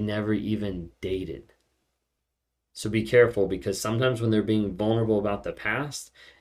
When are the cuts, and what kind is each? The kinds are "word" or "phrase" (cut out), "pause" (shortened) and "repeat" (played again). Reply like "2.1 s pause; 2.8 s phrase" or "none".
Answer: none